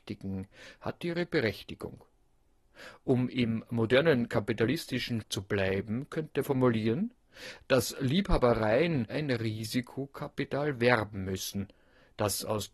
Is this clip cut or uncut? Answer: cut